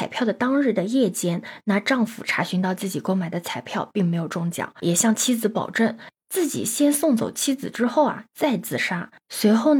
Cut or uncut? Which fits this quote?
cut